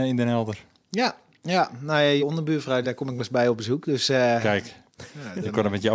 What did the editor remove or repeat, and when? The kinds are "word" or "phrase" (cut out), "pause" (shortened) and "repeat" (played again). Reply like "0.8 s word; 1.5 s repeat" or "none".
2.2 s word; 2.8 s word; 3.2 s word